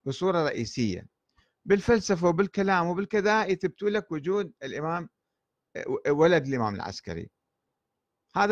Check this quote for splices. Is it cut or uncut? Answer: uncut